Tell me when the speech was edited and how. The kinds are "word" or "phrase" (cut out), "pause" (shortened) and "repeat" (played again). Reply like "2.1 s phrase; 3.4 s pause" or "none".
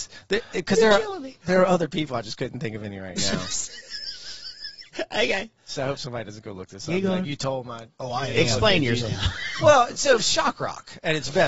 none